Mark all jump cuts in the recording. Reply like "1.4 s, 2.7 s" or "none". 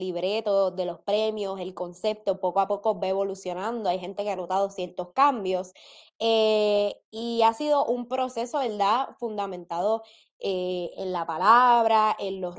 none